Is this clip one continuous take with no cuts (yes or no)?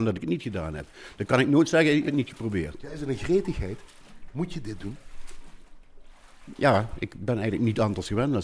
no